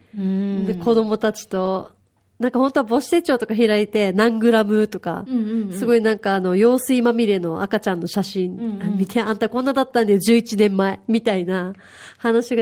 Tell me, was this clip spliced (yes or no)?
no